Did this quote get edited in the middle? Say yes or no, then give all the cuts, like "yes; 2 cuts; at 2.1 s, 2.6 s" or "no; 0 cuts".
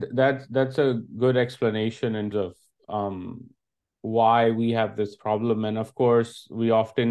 yes; 1 cut; at 2.3 s